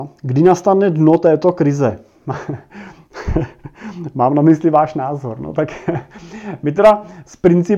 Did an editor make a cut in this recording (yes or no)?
no